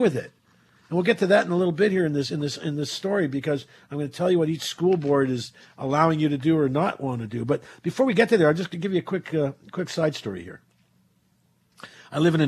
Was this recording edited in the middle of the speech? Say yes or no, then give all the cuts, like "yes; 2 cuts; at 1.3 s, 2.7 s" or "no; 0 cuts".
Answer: no; 0 cuts